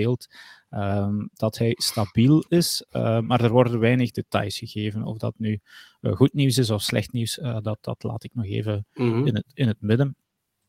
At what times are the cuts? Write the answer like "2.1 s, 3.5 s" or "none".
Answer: none